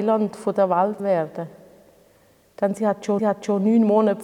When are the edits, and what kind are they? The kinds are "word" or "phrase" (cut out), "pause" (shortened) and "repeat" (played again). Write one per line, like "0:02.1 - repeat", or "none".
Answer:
0:01.0 - word
0:03.2 - repeat